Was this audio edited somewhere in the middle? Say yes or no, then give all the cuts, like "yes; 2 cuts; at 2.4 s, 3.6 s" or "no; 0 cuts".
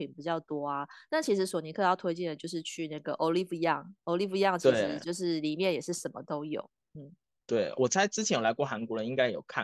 no; 0 cuts